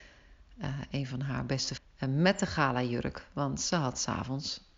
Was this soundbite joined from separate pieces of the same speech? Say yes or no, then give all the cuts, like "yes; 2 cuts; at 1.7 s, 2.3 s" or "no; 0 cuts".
yes; 1 cut; at 1.8 s